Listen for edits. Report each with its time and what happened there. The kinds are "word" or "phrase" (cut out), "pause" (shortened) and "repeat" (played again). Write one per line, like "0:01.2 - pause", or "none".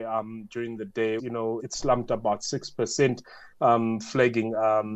0:01.2 - word
0:01.6 - word